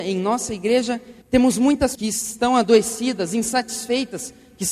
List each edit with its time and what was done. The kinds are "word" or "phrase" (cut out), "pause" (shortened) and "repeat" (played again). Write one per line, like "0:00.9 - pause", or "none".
0:01.2 - pause
0:01.9 - phrase

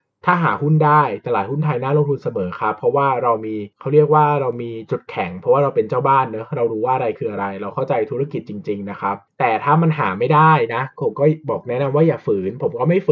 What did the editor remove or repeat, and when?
0:03.7 - pause

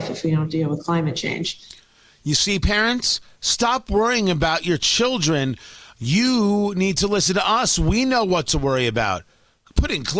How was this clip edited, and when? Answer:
none

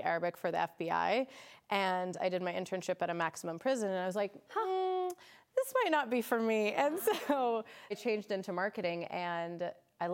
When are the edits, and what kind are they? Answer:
0:07.9 - word

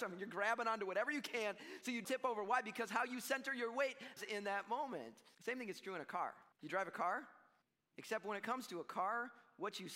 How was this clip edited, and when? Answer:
0:02.0 - word
0:04.2 - word
0:05.3 - pause
0:06.5 - pause
0:07.6 - pause

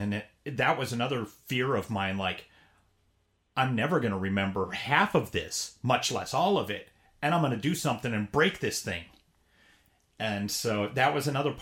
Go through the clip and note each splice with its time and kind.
none

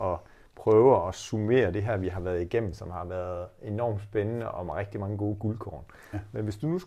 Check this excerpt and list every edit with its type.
none

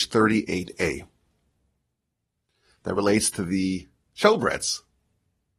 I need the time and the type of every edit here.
none

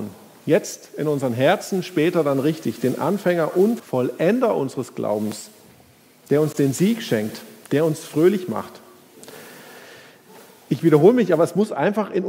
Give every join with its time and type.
0:03.8 - word

